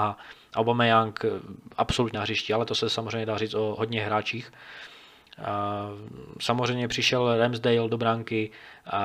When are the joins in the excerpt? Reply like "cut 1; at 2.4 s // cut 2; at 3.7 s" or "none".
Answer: cut 1; at 2.1 s // cut 2; at 3.8 s

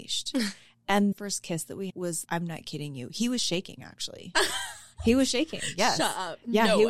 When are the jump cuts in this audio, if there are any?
cut 1; at 1.1 s // cut 2; at 1.9 s // cut 3; at 2.2 s

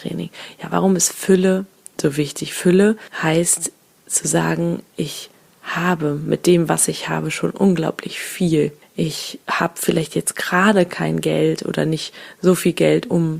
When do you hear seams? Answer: none

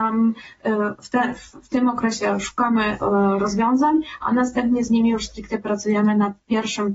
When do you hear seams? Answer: none

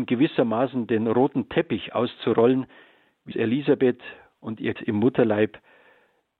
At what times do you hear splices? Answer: cut 1; at 3.3 s // cut 2; at 4.8 s

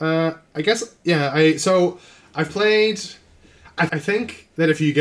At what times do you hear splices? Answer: cut 1; at 3.9 s

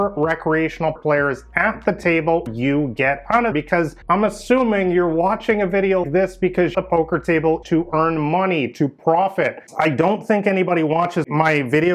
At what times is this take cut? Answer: cut 1; at 1.0 s // cut 2; at 2.5 s // cut 3; at 3.5 s // cut 4; at 4.0 s // cut 5; at 6.0 s // cut 6; at 6.7 s // cut 7; at 7.6 s

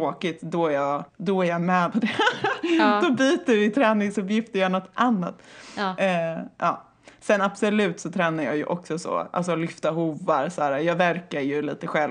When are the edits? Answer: cut 1; at 1.1 s // cut 2; at 1.9 s

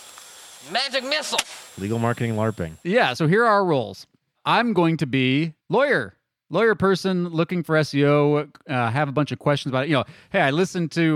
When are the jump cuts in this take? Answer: cut 1; at 1.7 s // cut 2; at 2.8 s // cut 3; at 4.2 s // cut 4; at 5.6 s

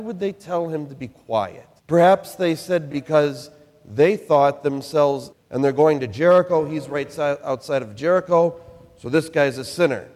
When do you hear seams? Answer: cut 1; at 1.8 s // cut 2; at 2.9 s // cut 3; at 5.3 s

